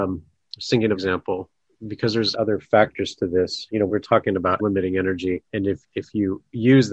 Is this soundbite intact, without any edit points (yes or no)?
no